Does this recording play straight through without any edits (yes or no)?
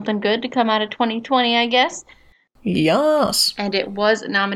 yes